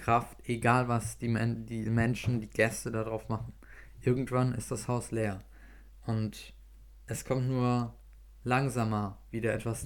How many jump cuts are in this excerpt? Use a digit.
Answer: 0